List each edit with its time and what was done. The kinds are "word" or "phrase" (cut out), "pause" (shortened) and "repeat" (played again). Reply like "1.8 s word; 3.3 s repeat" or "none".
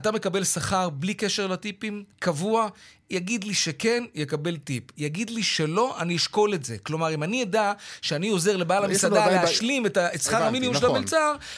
2.1 s pause